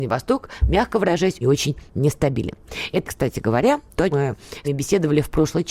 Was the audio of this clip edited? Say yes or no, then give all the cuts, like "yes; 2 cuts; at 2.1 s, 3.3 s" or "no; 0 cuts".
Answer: yes; 4 cuts; at 1.4 s, 3.0 s, 4.1 s, 4.6 s